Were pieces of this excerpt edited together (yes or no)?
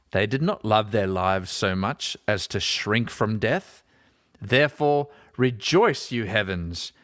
no